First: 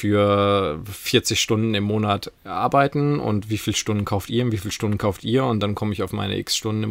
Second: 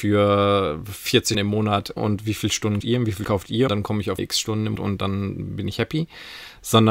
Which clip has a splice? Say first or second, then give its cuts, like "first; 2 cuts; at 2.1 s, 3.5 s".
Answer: second; 7 cuts; at 1.3 s, 2.0 s, 2.8 s, 3.2 s, 3.7 s, 4.2 s, 4.8 s